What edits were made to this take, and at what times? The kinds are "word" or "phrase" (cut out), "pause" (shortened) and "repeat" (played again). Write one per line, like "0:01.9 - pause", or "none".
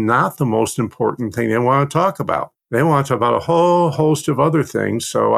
0:02.6 - pause